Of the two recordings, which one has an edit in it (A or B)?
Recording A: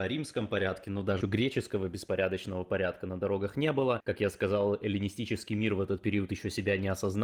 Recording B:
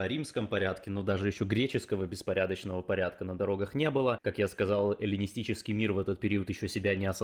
A